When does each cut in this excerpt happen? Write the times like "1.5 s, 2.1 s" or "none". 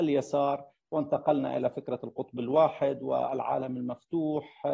none